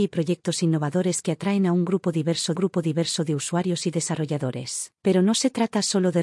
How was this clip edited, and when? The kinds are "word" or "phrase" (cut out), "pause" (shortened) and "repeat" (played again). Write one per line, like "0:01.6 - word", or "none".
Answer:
0:02.6 - repeat
0:05.0 - pause